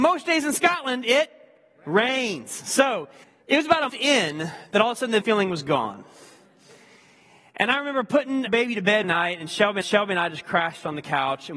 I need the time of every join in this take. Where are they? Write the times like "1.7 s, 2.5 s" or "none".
3.2 s, 3.9 s, 5.2 s, 8.5 s, 9.0 s, 9.8 s